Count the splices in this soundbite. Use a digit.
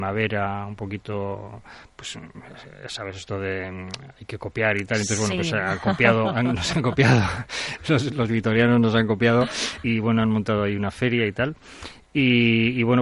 1